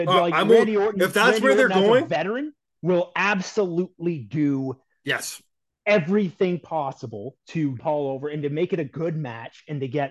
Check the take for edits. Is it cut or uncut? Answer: cut